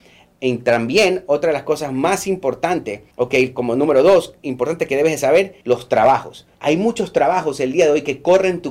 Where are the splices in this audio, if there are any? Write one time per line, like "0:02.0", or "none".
0:03.1
0:05.6
0:06.5